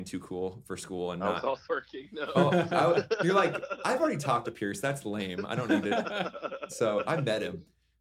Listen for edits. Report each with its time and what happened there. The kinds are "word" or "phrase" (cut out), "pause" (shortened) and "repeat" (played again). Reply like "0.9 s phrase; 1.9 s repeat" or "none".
1.7 s word